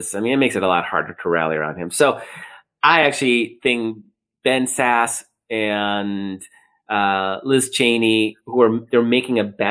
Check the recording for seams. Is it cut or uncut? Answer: uncut